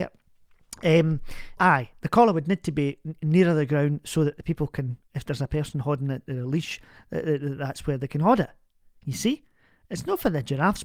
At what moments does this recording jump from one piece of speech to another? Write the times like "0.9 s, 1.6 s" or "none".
1.6 s